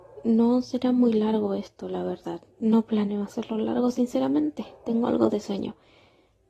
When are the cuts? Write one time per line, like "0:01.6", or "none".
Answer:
0:02.5